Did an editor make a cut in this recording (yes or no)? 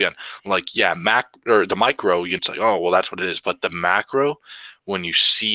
yes